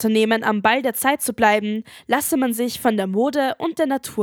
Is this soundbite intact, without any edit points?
yes; 0 cuts

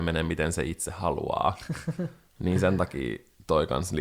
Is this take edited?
no; 0 cuts

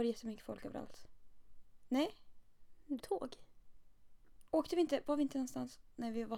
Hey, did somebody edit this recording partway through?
yes; 1 cut; at 3.0 s

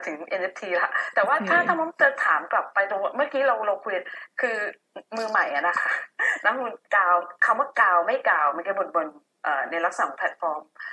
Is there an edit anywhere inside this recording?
yes; 1 cut; at 6.8 s

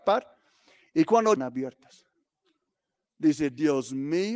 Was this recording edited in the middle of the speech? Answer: yes; 1 cut; at 1.4 s

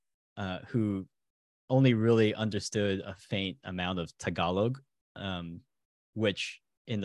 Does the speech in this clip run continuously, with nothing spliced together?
yes; 0 cuts

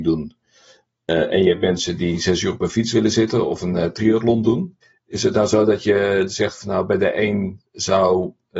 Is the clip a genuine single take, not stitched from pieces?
no; 2 cuts; at 4.8 s, 7.7 s

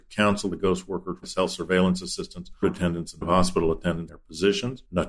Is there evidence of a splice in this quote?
yes; 4 cuts; at 1.2 s, 2.6 s, 3.2 s, 4.1 s

